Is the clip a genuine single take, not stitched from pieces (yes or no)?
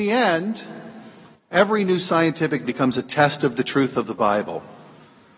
no